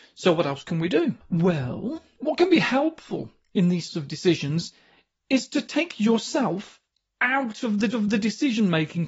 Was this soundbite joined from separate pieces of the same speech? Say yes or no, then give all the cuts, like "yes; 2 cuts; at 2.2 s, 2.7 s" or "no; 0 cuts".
yes; 3 cuts; at 1.2 s, 3.9 s, 7.9 s